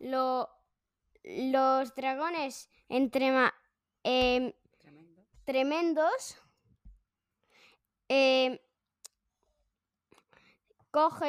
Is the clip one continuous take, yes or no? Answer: yes